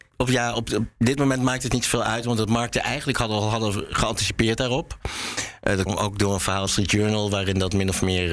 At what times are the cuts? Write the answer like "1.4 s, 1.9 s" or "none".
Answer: 5.9 s, 6.7 s